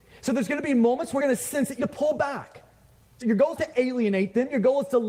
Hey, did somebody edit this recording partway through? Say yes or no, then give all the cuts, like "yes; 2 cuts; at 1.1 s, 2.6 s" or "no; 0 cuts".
yes; 4 cuts; at 1.2 s, 1.8 s, 3.2 s, 3.6 s